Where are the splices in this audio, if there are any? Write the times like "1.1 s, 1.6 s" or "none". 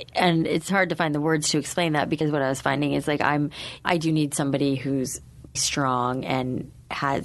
2.2 s, 3.8 s, 5.6 s